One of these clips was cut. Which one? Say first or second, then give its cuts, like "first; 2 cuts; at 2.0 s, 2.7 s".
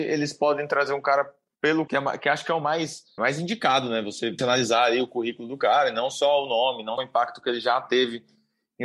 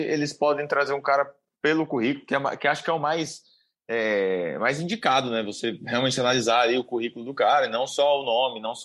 first; 4 cuts; at 1.9 s, 3.2 s, 4.4 s, 7.0 s